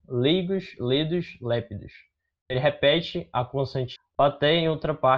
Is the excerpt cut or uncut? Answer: cut